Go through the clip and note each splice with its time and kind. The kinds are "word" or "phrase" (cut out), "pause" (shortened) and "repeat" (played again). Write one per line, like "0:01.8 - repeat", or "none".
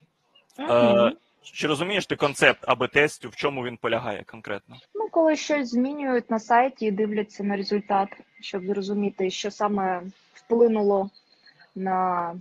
0:04.8 - pause